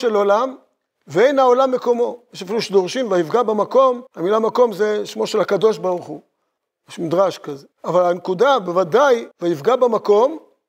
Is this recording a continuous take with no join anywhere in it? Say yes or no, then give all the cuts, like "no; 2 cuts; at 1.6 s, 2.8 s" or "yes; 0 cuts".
no; 4 cuts; at 4.1 s, 6.6 s, 7.7 s, 9.3 s